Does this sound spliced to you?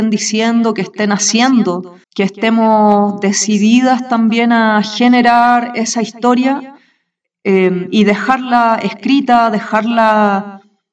yes; 1 cut; at 2.0 s

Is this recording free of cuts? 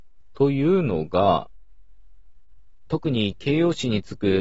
no; 1 cut; at 2.9 s

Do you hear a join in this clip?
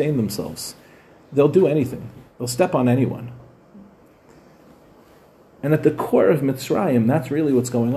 no; 0 cuts

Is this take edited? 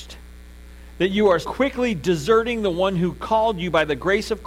yes; 1 cut; at 1.4 s

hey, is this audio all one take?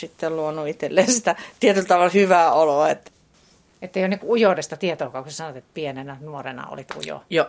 yes; 0 cuts

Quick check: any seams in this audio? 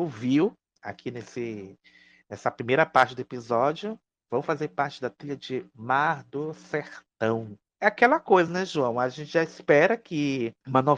no; 0 cuts

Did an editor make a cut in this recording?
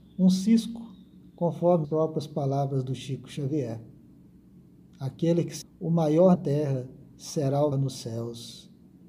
yes; 4 cuts; at 1.8 s, 5.6 s, 6.3 s, 7.7 s

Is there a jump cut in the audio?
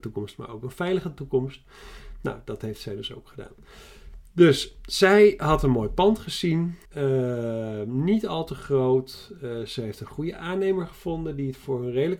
yes; 1 cut; at 6.9 s

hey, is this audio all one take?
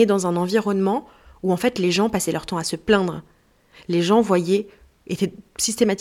yes; 0 cuts

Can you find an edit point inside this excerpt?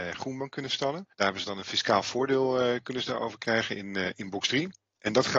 yes; 1 cut; at 1.1 s

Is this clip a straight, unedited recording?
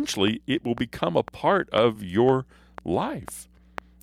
yes; 0 cuts

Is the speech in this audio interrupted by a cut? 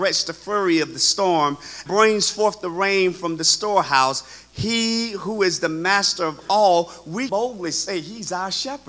yes; 2 cuts; at 1.9 s, 7.3 s

